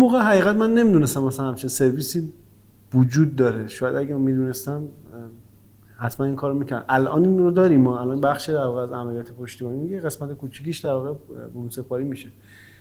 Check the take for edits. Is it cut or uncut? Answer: uncut